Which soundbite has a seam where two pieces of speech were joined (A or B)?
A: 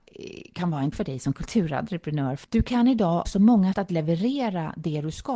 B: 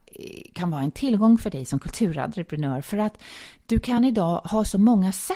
A